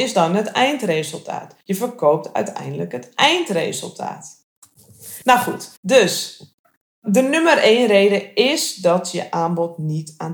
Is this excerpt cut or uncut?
cut